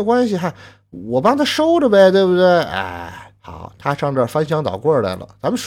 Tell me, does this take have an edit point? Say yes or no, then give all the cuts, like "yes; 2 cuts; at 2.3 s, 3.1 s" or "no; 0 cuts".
yes; 1 cut; at 3.4 s